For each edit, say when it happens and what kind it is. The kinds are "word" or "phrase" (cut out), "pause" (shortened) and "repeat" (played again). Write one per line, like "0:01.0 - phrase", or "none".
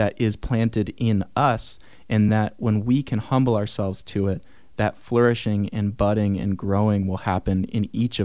none